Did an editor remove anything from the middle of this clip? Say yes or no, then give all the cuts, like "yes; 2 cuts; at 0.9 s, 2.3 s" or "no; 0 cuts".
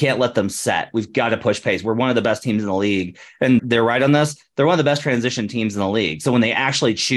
yes; 1 cut; at 3.6 s